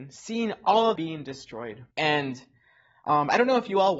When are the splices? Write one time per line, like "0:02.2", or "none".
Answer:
0:01.0
0:01.9